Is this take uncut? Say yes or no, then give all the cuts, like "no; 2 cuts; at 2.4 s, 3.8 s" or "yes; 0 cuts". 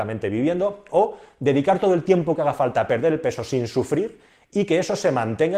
yes; 0 cuts